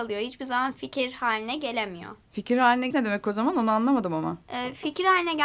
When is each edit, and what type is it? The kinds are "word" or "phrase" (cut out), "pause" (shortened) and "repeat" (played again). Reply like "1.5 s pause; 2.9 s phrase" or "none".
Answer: 2.3 s pause; 2.9 s word